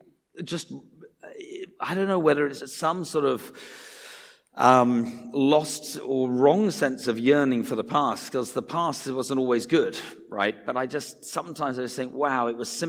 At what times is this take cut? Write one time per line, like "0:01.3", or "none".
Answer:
0:02.6